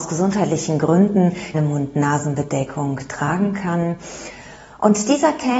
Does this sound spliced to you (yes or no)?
yes